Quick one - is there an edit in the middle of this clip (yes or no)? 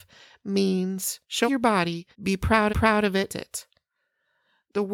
yes